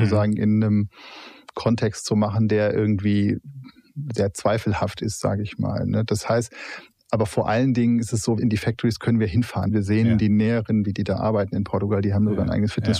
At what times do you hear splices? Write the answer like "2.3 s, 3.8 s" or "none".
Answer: none